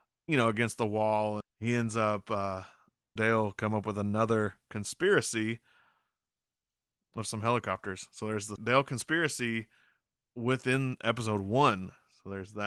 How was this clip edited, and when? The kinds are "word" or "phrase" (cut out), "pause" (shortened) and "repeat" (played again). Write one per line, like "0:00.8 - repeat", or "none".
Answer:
0:01.4 - word
0:03.2 - word
0:08.6 - word